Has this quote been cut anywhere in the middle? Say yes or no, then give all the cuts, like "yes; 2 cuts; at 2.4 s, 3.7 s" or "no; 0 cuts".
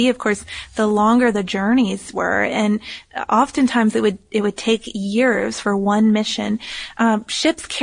no; 0 cuts